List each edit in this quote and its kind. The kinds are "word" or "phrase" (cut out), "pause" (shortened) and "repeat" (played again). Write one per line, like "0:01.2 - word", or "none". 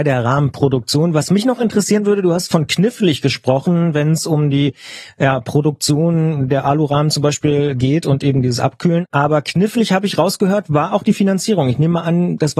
none